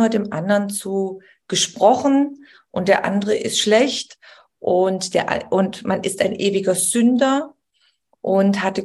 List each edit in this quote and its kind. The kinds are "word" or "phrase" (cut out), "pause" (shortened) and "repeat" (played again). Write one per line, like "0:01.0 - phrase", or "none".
none